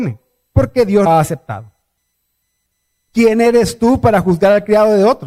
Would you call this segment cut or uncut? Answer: cut